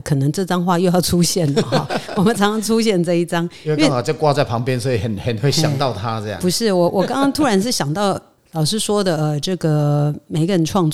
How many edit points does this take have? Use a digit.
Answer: 0